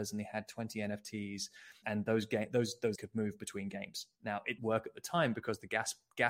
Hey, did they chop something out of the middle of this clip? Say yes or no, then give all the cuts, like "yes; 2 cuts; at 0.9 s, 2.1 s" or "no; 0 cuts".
yes; 3 cuts; at 1.8 s, 2.9 s, 4.6 s